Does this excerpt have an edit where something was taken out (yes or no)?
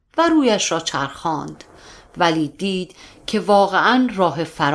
no